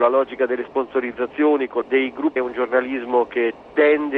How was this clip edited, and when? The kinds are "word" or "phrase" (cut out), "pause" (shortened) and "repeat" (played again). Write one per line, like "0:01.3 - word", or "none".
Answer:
0:01.8 - phrase
0:02.4 - phrase